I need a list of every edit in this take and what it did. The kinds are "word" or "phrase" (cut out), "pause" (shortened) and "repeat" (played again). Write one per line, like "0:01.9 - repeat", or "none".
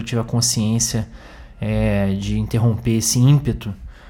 none

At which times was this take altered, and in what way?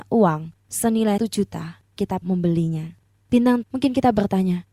0:01.2 - word
0:02.2 - word
0:03.6 - word

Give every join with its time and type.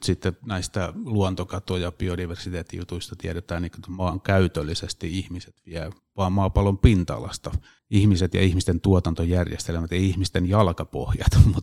0:07.8 - pause

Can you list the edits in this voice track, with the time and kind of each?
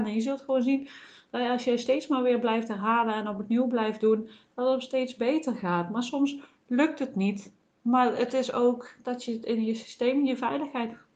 none

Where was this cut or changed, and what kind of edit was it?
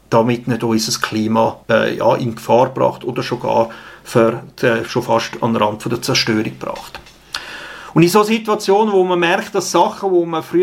0:01.6 - pause

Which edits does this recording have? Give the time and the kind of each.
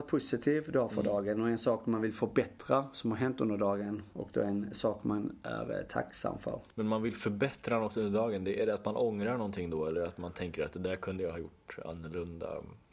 0:06.7 - pause

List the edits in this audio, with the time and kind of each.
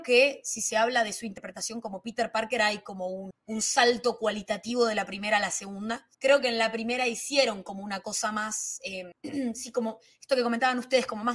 0:06.1 - pause

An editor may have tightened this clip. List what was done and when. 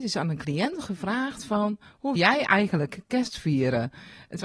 0:02.2 - word

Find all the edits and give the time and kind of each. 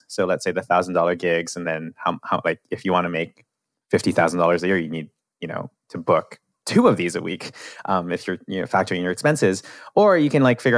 none

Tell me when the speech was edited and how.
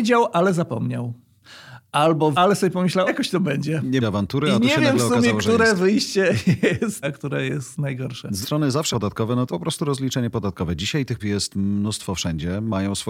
0:02.3 - word
0:03.1 - word
0:04.0 - word
0:07.0 - word
0:08.4 - word
0:08.9 - word
0:09.5 - word
0:11.2 - word

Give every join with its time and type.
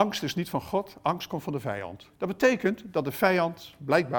0:02.2 - pause

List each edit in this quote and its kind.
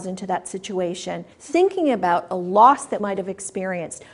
0:01.3 - pause
0:03.0 - word

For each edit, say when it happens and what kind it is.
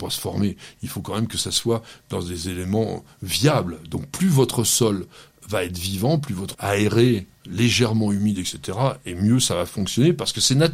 0:06.5 - phrase

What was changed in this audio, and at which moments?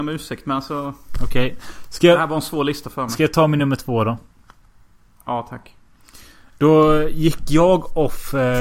none

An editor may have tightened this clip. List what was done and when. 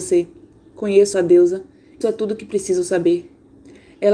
0:01.1 - word
0:02.0 - word

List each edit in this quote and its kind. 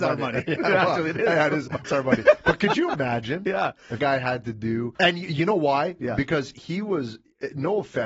0:01.8 - phrase
0:04.0 - word
0:05.0 - word

